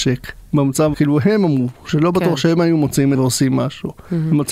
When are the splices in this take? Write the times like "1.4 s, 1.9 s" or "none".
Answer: 0.9 s, 3.1 s